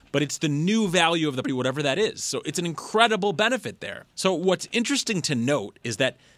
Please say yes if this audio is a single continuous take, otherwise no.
no